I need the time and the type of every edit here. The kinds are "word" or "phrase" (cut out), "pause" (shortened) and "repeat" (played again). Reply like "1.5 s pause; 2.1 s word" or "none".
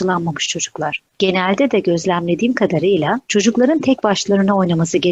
1.1 s pause; 3.2 s pause